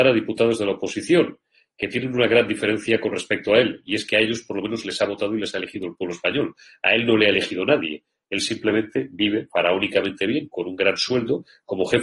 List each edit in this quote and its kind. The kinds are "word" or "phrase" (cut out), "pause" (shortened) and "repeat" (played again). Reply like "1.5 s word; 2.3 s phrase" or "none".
none